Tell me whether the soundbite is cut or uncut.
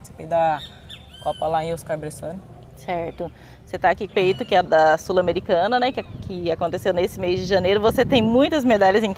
cut